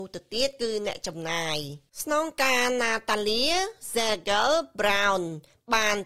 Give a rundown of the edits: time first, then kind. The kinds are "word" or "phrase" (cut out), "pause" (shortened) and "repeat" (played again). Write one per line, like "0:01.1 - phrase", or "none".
0:01.9 - pause